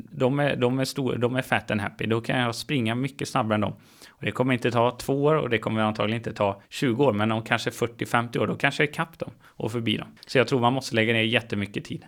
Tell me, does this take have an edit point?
yes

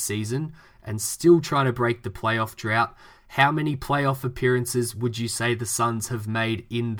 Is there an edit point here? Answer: no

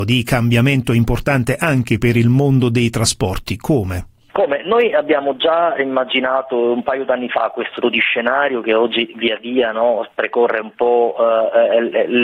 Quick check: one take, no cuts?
no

